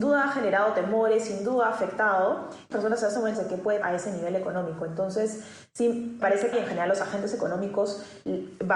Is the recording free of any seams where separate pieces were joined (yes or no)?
no